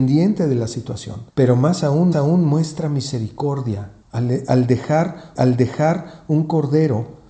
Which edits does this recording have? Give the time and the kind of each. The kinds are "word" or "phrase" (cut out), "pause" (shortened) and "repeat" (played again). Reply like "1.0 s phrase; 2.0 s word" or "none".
1.3 s pause; 2.1 s repeat; 4.0 s pause; 5.4 s repeat